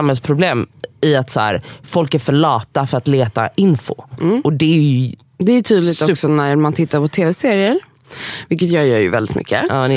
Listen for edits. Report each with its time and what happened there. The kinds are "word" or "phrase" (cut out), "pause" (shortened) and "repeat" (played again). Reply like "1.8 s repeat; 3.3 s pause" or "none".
none